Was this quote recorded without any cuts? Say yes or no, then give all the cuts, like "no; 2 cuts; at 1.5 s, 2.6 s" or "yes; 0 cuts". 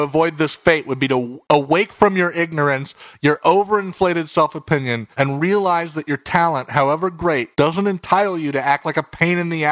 no; 2 cuts; at 5.1 s, 7.5 s